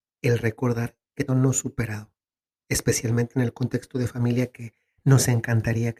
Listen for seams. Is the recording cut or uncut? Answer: cut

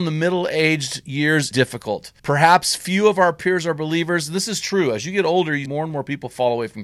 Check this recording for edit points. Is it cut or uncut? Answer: cut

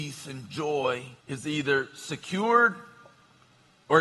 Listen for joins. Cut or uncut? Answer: cut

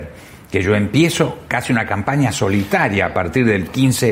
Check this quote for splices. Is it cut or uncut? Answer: uncut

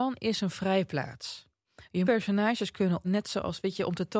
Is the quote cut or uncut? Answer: cut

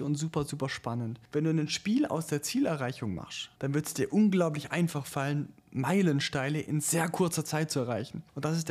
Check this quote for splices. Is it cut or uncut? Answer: cut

